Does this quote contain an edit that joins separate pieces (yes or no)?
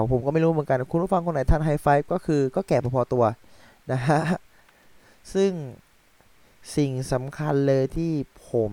no